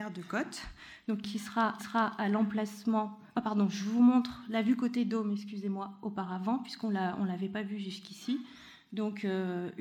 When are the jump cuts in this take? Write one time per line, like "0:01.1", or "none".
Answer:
0:01.8